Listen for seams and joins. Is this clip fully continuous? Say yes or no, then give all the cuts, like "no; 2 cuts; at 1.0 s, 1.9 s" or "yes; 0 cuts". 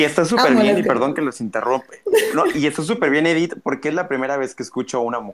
yes; 0 cuts